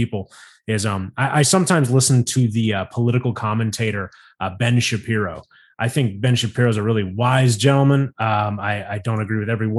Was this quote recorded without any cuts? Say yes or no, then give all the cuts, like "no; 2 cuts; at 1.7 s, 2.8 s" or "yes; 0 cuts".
yes; 0 cuts